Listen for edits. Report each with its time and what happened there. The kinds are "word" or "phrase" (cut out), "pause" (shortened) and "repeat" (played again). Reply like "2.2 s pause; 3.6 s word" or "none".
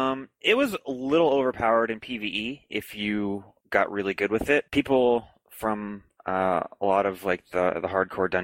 4.7 s pause

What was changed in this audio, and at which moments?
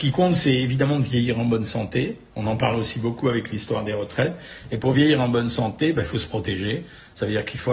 none

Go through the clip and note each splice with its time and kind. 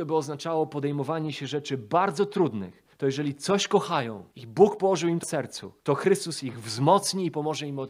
2.9 s pause; 4.3 s pause; 5.2 s word; 5.8 s pause

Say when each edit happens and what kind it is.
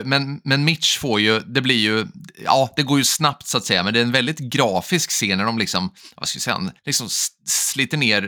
6.8 s pause

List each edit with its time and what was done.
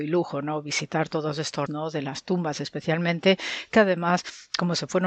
1.7 s word

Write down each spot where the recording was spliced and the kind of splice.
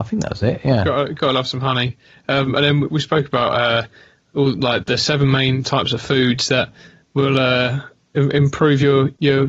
4.8 s word

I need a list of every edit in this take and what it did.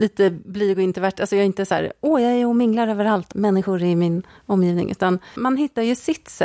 3.3 s phrase

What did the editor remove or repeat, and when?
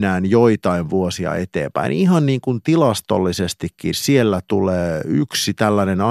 3.9 s word

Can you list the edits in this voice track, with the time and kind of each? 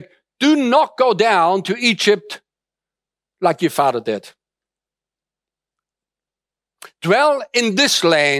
none

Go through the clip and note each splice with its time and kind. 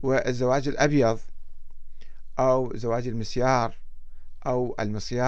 none

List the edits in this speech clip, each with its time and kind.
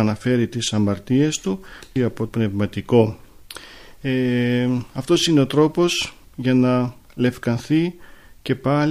2.0 s phrase; 2.3 s word; 6.2 s pause

